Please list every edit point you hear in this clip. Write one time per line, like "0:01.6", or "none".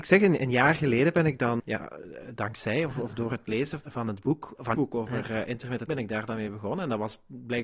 0:01.6
0:03.8
0:04.7
0:05.9